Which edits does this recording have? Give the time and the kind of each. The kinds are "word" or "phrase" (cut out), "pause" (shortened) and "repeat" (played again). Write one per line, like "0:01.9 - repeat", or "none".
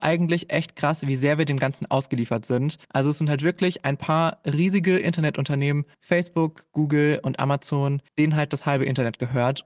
0:02.8 - pause
0:05.9 - pause
0:08.1 - pause